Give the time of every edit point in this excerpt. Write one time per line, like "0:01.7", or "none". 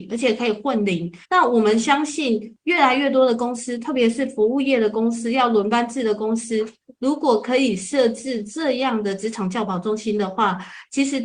0:01.2